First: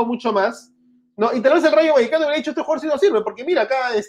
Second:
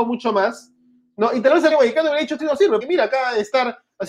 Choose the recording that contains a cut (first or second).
second